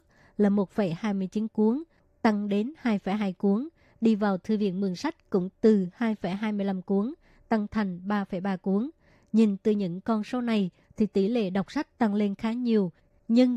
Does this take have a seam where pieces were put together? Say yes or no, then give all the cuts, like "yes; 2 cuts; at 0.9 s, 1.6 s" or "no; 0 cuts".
no; 0 cuts